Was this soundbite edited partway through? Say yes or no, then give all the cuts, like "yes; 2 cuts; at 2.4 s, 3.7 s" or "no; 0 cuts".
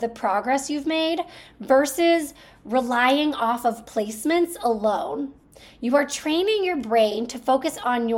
no; 0 cuts